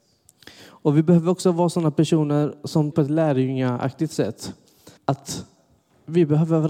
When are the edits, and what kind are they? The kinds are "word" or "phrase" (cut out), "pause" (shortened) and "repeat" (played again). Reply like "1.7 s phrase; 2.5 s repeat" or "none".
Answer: 2.9 s word; 5.0 s pause